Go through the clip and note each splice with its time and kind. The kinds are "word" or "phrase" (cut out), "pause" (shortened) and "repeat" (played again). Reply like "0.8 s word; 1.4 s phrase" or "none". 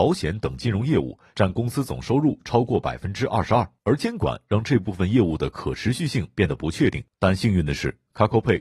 3.8 s pause; 7.1 s pause